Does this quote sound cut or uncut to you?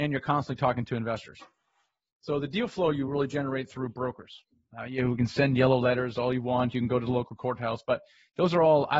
uncut